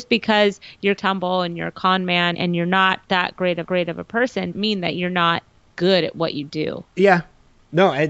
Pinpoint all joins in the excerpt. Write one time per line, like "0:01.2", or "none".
0:01.0
0:02.3
0:03.6
0:04.5
0:05.7
0:06.9